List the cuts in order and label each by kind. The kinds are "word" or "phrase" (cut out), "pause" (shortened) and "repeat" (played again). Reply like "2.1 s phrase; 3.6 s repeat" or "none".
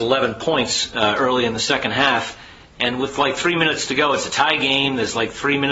none